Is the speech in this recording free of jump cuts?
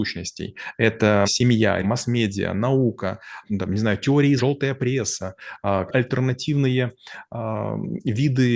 no; 5 cuts; at 1.2 s, 1.8 s, 3.4 s, 4.4 s, 5.9 s

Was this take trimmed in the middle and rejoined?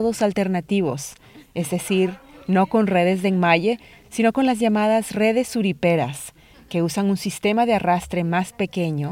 no; 0 cuts

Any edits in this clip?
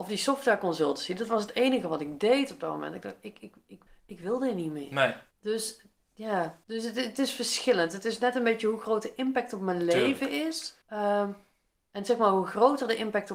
yes; 4 cuts; at 3.9 s, 5.3 s, 6.6 s, 10.8 s

